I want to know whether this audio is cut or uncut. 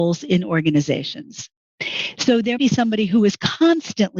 cut